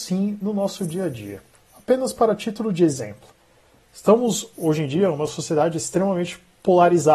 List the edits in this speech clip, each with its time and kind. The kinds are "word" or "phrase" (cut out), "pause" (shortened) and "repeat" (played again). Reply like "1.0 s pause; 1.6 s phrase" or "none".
none